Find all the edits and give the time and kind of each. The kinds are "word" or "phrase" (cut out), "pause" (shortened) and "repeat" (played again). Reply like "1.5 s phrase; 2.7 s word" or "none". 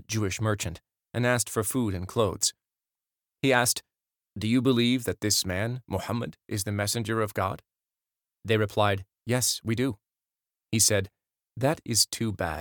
none